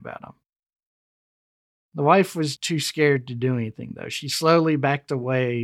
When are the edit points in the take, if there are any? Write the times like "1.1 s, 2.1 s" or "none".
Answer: 2.6 s